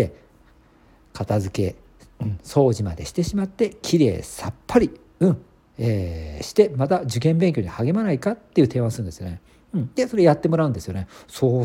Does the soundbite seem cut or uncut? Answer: uncut